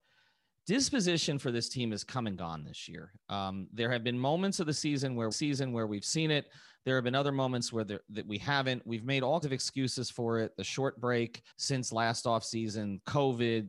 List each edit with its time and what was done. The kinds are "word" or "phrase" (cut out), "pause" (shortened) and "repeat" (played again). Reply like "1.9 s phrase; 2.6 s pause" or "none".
5.3 s repeat; 9.4 s word; 11.5 s pause

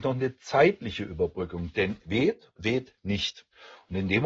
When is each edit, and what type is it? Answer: 2.0 s word; 2.6 s word

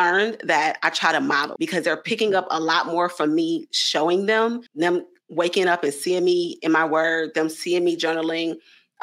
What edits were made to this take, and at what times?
1.6 s word; 4.7 s pause

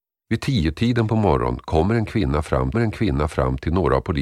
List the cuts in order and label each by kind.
2.7 s repeat

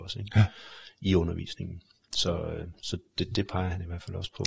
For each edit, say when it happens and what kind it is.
none

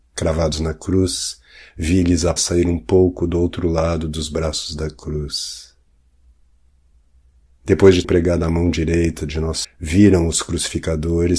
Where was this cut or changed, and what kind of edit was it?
2.4 s word; 8.0 s word; 9.6 s word

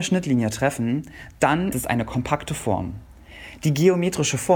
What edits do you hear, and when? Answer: 1.7 s word

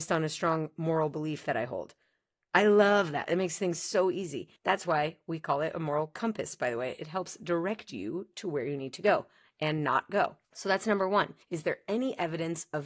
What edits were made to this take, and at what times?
4.6 s pause; 10.4 s pause; 11.4 s pause

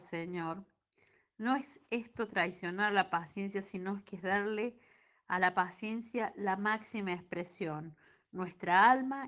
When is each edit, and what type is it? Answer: none

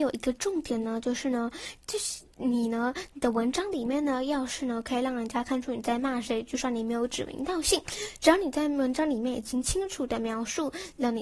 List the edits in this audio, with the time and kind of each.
none

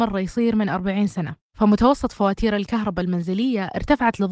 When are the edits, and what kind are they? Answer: 1.4 s pause

